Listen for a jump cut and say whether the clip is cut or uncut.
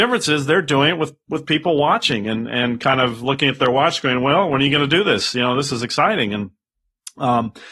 uncut